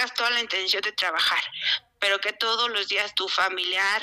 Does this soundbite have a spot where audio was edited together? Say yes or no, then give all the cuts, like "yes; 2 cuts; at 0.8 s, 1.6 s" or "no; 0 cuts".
no; 0 cuts